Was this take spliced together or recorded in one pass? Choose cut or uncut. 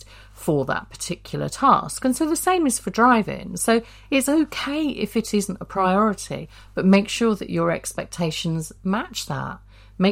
uncut